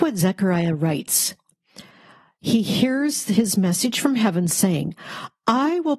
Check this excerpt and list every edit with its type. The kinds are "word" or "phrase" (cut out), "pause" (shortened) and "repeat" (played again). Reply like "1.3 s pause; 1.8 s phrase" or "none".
none